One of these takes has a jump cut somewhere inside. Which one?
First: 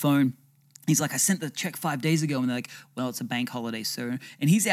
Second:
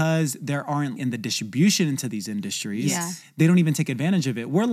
second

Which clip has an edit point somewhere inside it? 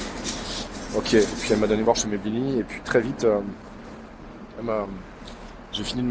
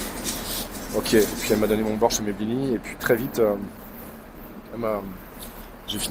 first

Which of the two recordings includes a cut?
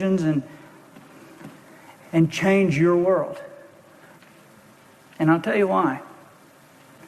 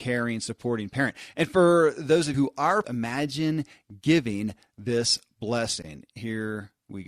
second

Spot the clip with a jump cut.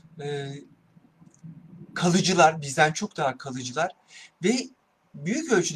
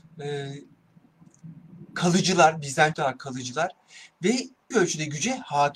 second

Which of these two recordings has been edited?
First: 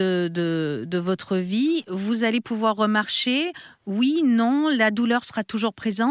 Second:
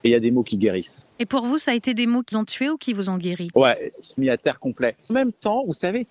second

